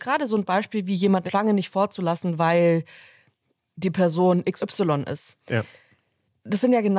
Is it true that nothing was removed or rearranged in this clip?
no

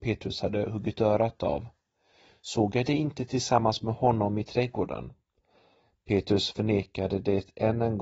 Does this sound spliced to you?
no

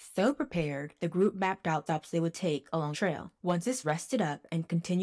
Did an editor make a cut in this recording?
yes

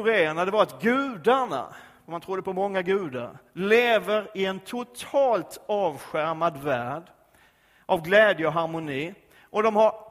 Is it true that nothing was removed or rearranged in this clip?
yes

